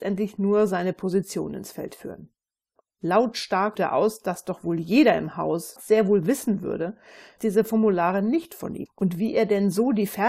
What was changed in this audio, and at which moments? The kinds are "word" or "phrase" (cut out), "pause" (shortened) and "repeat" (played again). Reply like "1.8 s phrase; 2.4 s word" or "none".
3.8 s word; 5.8 s word; 7.4 s word; 8.9 s word